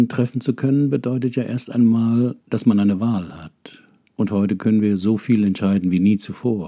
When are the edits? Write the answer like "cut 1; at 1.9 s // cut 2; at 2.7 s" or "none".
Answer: cut 1; at 2.4 s // cut 2; at 4.1 s